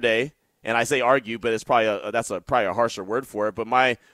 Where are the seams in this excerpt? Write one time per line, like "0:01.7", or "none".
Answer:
none